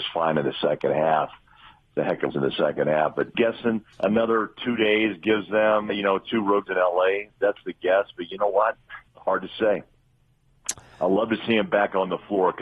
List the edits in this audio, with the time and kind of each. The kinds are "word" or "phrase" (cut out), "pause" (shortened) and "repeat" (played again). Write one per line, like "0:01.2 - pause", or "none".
0:02.3 - phrase
0:03.3 - word
0:03.9 - pause
0:05.9 - word
0:06.7 - word
0:09.1 - pause